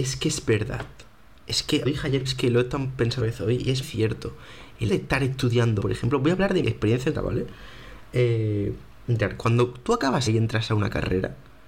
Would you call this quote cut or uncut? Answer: cut